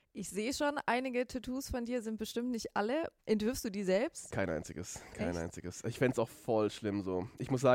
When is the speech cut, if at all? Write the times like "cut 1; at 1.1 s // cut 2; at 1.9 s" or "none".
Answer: cut 1; at 3.2 s